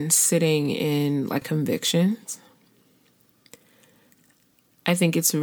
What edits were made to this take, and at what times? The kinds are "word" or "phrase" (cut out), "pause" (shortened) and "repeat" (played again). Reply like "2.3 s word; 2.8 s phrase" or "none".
1.4 s word

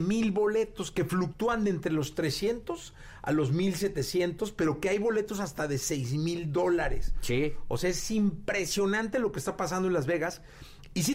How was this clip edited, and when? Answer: none

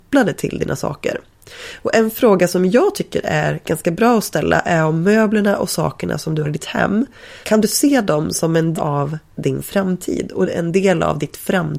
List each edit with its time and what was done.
6.4 s word; 7.4 s pause; 8.8 s word

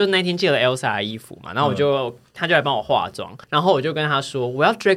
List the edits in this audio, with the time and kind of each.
3.4 s pause

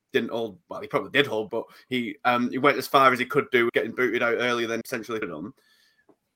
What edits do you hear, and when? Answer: 1.5 s word; 3.7 s word; 4.8 s word; 5.2 s word

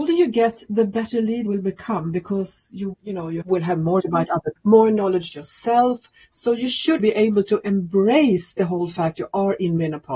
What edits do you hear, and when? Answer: 1.5 s word; 2.9 s word; 3.4 s word; 4.0 s word; 4.6 s word; 5.3 s word; 7.0 s word; 9.2 s word

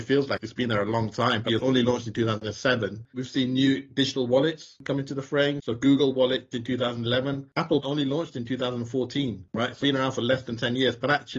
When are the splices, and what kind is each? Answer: 1.5 s word; 6.5 s word; 7.8 s word; 9.8 s word

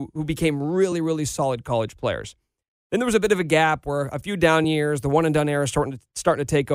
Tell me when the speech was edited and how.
none

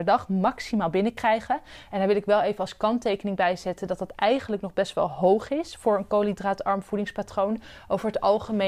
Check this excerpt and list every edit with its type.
none

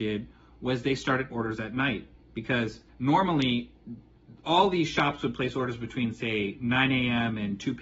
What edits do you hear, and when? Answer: 1.3 s word; 2.9 s pause

